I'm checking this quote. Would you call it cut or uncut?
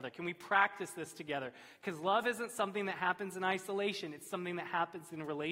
uncut